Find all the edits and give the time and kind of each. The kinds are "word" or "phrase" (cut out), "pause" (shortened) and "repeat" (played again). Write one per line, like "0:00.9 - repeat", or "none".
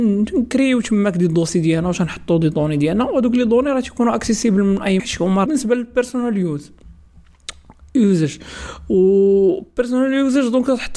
0:05.0 - word
0:05.5 - phrase